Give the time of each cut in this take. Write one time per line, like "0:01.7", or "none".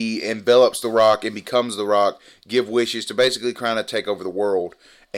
none